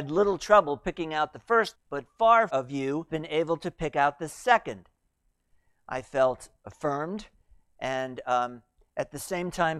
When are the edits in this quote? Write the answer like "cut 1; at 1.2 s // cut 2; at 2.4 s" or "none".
cut 1; at 1.7 s // cut 2; at 2.5 s // cut 3; at 3.1 s